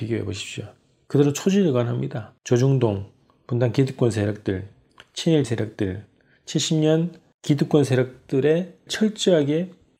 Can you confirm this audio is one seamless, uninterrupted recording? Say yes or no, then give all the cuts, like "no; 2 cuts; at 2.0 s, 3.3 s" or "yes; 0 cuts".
no; 3 cuts; at 2.4 s, 5.4 s, 8.9 s